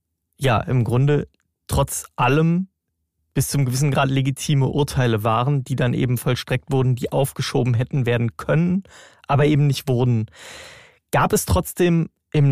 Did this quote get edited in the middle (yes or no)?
no